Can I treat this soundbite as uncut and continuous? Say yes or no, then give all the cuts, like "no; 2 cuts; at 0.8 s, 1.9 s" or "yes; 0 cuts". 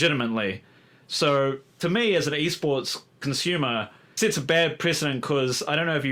no; 1 cut; at 4.2 s